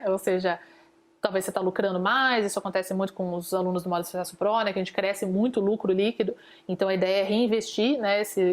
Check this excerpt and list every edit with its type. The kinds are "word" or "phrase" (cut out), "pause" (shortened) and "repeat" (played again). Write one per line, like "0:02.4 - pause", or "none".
none